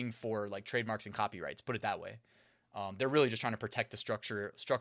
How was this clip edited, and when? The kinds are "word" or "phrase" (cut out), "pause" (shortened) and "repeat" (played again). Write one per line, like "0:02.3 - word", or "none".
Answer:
none